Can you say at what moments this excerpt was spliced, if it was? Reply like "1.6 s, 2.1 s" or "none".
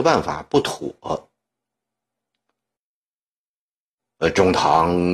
none